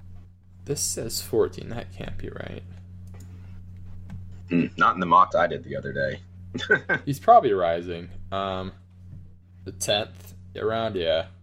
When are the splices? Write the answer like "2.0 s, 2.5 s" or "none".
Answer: 5.3 s